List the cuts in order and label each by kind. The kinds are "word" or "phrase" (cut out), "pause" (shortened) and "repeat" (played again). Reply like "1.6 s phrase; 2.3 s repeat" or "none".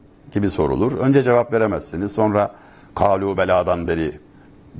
none